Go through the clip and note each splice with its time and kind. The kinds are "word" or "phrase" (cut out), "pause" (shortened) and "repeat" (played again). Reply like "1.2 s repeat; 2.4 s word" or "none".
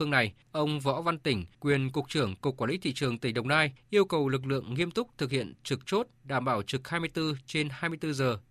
none